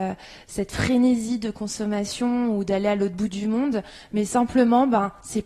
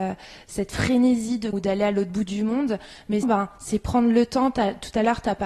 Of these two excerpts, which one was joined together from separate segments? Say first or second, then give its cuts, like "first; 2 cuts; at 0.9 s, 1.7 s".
second; 2 cuts; at 1.5 s, 3.2 s